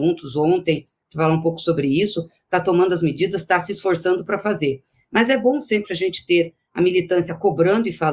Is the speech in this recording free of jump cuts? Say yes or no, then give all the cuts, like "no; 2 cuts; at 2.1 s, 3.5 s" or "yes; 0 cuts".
yes; 0 cuts